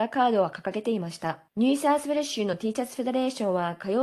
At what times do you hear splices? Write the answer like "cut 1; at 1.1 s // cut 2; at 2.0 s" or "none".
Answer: cut 1; at 1.5 s